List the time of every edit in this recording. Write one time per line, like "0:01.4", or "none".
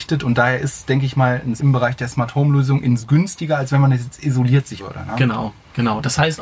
0:01.6
0:03.0
0:04.8